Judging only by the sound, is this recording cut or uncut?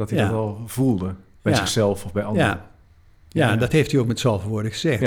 uncut